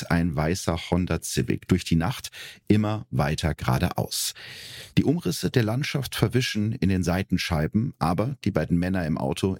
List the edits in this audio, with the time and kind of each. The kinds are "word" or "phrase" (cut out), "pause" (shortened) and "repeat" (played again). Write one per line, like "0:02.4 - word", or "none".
0:04.9 - pause